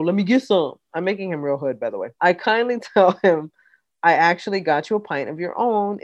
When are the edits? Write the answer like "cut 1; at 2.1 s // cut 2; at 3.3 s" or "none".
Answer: cut 1; at 2.1 s